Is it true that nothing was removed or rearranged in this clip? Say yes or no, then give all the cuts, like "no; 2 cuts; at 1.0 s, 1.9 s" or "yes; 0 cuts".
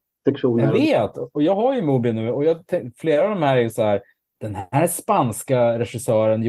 yes; 0 cuts